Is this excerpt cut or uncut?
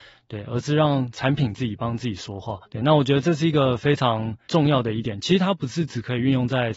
cut